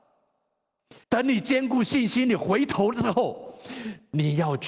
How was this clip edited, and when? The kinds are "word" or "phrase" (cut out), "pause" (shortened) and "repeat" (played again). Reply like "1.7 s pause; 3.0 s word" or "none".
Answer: 1.0 s pause